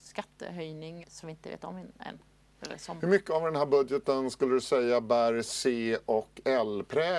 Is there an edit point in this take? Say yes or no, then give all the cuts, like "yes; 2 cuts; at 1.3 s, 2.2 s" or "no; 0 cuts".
yes; 1 cut; at 1.0 s